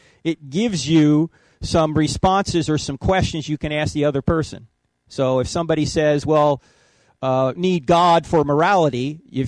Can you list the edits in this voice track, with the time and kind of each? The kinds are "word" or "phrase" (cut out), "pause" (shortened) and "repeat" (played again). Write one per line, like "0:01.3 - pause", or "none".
0:07.5 - phrase